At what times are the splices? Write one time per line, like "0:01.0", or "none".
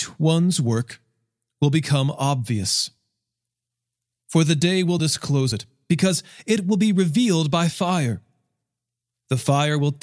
none